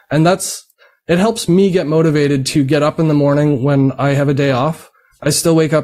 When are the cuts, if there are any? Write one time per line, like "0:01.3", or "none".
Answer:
none